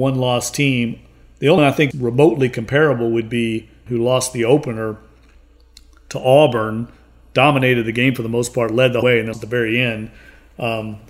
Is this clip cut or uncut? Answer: cut